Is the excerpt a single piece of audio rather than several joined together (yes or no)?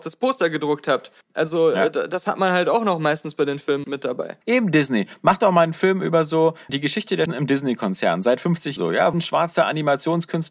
no